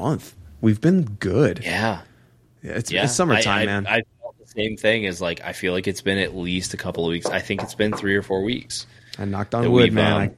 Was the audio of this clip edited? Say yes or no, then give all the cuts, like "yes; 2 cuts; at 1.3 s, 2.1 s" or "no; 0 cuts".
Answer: no; 0 cuts